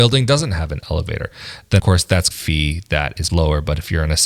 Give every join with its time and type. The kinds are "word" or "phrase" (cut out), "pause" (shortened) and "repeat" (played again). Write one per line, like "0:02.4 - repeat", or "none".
0:01.8 - word
0:02.3 - phrase
0:03.3 - word